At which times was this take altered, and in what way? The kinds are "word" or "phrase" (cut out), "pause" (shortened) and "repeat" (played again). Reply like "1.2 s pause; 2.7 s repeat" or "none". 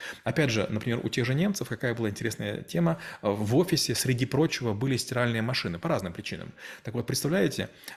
none